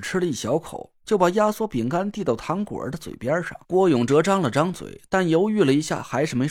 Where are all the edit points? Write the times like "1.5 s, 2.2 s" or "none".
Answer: 3.6 s